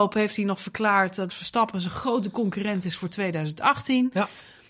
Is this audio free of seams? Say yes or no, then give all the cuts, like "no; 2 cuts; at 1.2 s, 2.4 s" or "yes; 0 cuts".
no; 1 cut; at 1.3 s